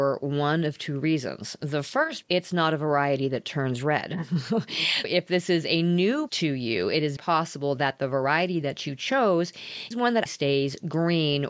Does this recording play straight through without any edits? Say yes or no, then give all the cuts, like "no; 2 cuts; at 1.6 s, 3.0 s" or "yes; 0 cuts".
no; 6 cuts; at 2.2 s, 5.0 s, 6.3 s, 7.2 s, 9.9 s, 10.3 s